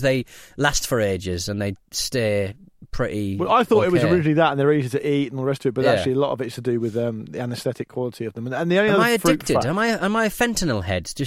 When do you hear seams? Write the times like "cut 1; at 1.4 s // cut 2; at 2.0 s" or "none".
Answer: none